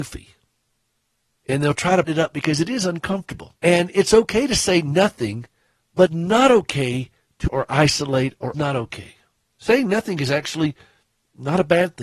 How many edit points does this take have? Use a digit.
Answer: 5